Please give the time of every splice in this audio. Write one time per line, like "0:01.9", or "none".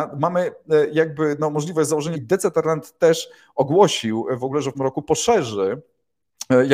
0:02.1
0:04.7